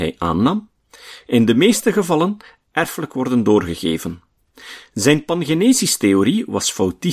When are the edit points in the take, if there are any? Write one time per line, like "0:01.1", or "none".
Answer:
none